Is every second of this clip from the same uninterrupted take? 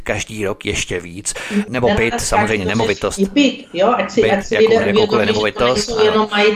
yes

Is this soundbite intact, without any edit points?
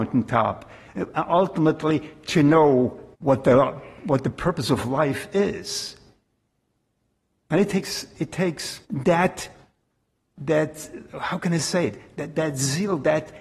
no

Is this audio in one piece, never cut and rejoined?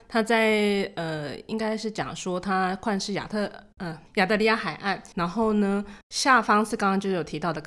no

